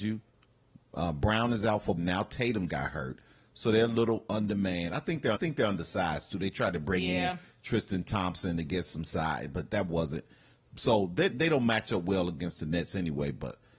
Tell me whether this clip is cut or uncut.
cut